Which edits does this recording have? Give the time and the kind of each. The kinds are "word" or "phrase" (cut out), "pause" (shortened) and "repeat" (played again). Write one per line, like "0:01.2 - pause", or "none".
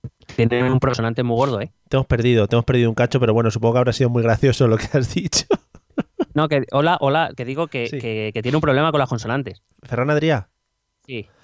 0:09.7 - pause